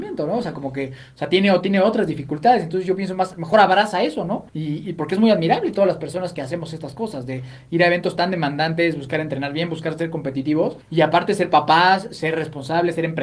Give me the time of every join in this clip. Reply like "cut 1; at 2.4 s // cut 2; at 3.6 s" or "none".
cut 1; at 4.5 s // cut 2; at 10.8 s